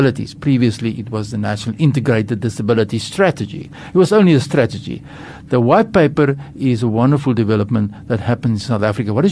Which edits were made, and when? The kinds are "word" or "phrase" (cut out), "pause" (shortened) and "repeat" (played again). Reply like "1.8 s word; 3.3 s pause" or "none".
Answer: none